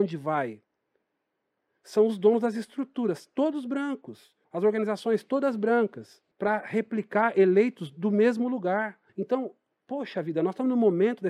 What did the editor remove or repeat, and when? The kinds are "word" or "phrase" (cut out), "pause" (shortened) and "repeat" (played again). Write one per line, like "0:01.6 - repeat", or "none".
0:04.4 - pause
0:06.3 - pause
0:09.1 - pause